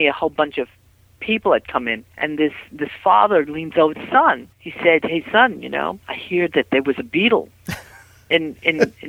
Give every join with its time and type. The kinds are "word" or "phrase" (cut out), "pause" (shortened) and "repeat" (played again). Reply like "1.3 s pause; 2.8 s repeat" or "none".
2.1 s pause; 3.9 s word; 4.5 s pause; 6.0 s pause